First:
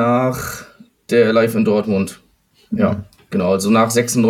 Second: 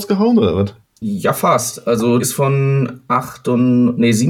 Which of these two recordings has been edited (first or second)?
second